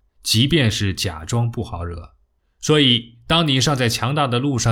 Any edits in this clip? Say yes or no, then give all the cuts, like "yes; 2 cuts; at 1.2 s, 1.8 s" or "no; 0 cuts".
yes; 1 cut; at 2.4 s